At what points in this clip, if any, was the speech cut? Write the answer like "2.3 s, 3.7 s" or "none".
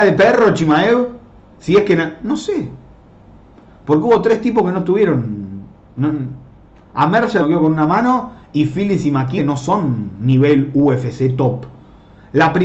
7.4 s, 9.4 s